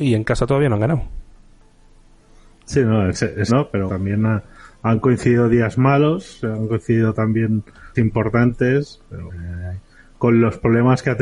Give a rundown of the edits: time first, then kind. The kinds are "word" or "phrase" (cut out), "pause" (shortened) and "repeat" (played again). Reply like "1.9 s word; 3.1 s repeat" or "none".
3.5 s word; 3.9 s word; 7.9 s word; 9.3 s word